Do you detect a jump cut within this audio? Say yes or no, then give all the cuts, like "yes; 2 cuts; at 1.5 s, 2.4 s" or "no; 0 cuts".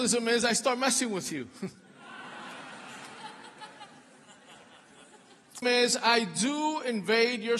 yes; 1 cut; at 5.6 s